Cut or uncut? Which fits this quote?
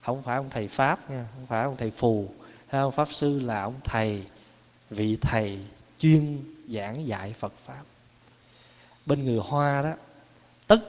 uncut